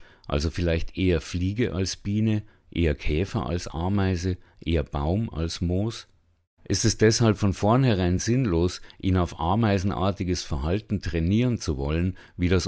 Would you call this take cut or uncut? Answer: uncut